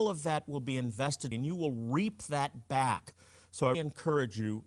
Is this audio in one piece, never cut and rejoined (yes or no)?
no